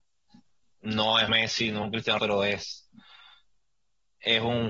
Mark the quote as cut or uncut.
cut